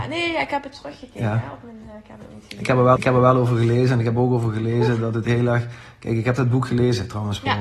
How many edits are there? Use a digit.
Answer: 1